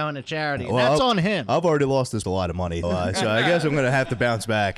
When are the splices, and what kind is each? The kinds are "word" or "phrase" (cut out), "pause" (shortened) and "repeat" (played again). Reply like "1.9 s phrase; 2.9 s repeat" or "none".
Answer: 2.2 s word; 2.8 s word